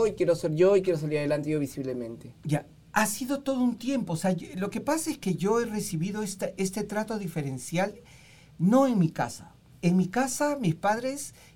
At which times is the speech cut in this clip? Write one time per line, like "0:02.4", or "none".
none